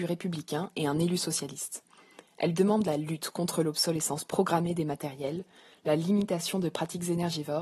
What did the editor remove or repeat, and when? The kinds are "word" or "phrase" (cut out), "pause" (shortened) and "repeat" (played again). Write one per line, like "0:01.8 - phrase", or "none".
none